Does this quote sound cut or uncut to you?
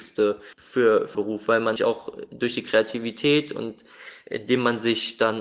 cut